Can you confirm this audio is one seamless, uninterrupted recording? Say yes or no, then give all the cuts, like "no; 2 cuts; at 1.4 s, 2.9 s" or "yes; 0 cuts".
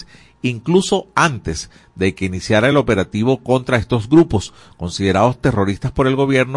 yes; 0 cuts